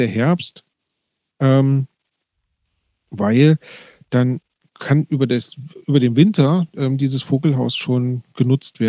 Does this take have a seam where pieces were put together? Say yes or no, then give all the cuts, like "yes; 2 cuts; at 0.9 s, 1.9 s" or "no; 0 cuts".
no; 0 cuts